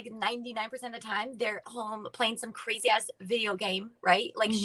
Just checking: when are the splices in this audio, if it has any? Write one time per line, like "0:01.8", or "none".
0:01.6